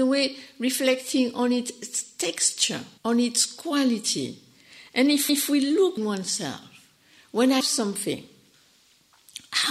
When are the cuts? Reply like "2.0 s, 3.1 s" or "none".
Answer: 3.0 s, 5.3 s, 6.0 s, 7.6 s